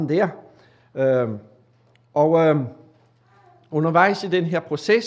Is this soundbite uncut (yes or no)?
yes